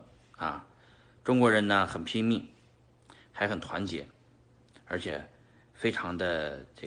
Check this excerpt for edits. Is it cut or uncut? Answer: uncut